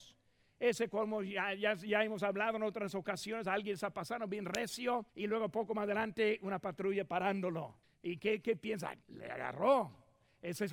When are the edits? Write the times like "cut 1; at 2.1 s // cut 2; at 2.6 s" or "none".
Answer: cut 1; at 5.1 s // cut 2; at 7.8 s // cut 3; at 9.0 s